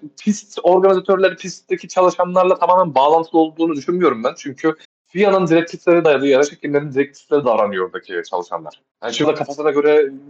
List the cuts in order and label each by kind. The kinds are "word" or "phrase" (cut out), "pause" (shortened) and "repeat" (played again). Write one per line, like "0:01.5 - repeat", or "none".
0:04.8 - pause
0:06.0 - word
0:07.4 - word
0:08.9 - pause
0:09.2 - word